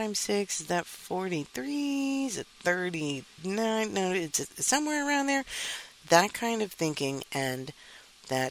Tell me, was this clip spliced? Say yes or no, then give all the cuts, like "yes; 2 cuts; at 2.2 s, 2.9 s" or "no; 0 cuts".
no; 0 cuts